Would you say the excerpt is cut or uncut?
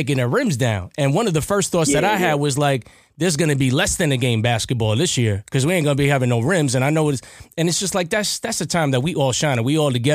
uncut